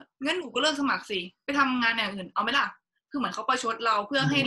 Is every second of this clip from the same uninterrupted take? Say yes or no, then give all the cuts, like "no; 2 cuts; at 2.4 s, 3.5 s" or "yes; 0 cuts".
yes; 0 cuts